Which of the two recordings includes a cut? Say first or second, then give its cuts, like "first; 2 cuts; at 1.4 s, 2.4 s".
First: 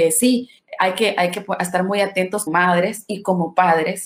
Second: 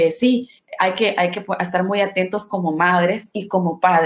first; 1 cut; at 2.5 s